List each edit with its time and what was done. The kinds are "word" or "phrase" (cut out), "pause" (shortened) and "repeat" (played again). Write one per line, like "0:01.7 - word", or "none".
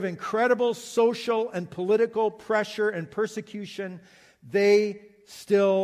none